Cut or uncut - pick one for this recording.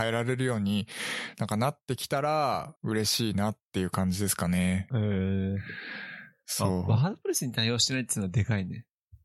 cut